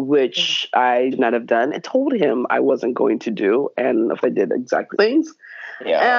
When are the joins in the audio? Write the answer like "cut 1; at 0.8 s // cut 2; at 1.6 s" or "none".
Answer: cut 1; at 1.1 s // cut 2; at 1.7 s // cut 3; at 4.2 s // cut 4; at 4.9 s